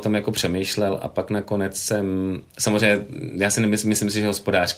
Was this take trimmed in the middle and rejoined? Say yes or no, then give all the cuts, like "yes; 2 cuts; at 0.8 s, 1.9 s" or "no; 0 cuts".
no; 0 cuts